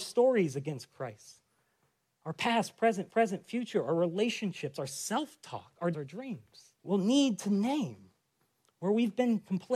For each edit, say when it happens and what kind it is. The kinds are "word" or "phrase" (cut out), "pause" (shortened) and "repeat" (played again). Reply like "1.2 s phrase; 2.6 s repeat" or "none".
3.1 s repeat; 5.9 s word; 6.8 s pause

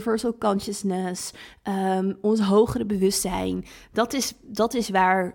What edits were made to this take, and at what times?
none

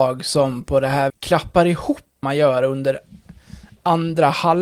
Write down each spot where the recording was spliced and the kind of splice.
1.1 s word; 2.2 s word

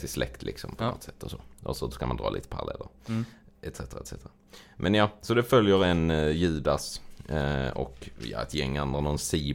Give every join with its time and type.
none

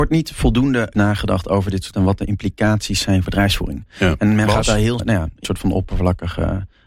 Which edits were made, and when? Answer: 0.9 s word; 1.9 s word; 3.2 s word; 5.0 s word; 5.4 s word

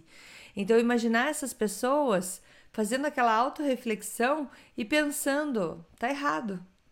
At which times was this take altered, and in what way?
none

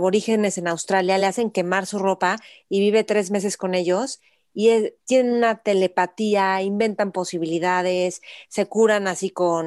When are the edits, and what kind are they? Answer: none

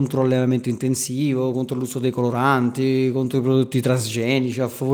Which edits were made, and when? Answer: none

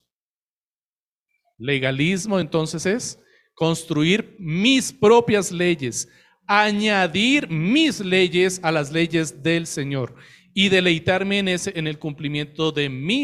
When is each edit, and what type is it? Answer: none

